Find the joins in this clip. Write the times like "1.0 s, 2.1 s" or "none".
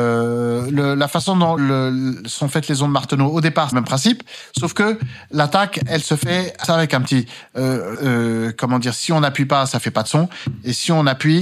1.6 s, 3.7 s, 6.6 s, 7.9 s

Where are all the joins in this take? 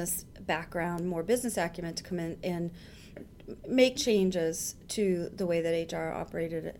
3.2 s, 3.9 s

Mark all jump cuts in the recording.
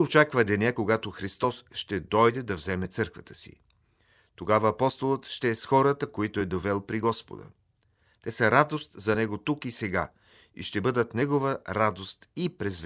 none

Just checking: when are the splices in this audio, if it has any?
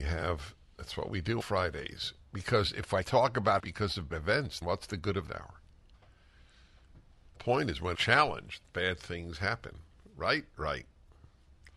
1.4 s, 3.0 s, 3.6 s, 4.1 s, 4.6 s, 5.3 s, 7.3 s, 7.9 s, 8.6 s

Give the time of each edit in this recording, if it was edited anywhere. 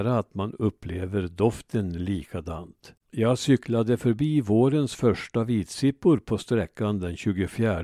3.0 s

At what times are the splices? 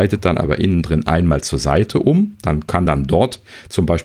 none

